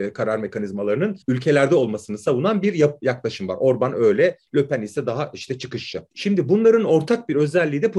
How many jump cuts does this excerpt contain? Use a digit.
2